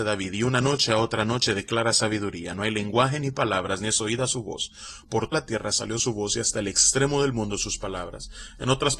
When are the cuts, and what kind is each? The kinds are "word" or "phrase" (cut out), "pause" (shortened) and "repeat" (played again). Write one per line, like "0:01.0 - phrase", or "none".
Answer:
0:05.3 - word